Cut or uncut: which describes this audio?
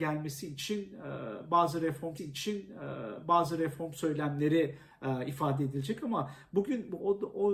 cut